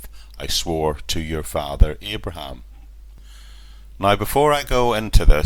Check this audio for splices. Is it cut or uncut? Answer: uncut